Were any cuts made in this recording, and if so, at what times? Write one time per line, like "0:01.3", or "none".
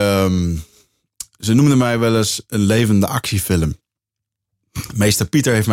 none